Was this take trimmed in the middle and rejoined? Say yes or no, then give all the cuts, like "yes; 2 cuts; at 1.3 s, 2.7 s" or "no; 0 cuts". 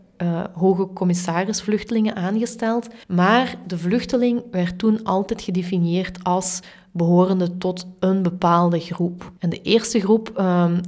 yes; 3 cuts; at 1.6 s, 3.0 s, 9.4 s